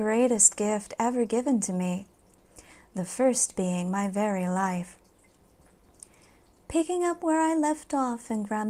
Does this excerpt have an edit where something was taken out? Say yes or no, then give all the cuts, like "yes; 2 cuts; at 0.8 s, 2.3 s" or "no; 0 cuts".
no; 0 cuts